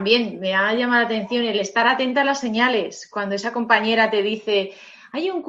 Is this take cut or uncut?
uncut